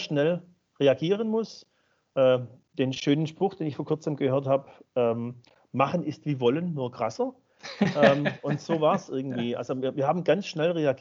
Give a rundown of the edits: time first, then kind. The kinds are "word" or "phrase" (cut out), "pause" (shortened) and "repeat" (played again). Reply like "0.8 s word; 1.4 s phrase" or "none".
none